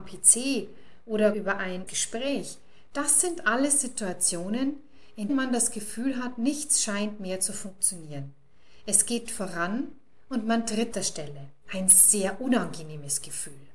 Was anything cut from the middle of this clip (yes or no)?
yes